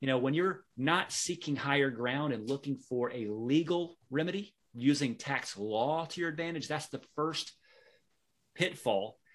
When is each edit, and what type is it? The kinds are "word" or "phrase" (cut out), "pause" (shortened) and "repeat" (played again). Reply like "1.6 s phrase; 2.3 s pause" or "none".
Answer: 4.6 s pause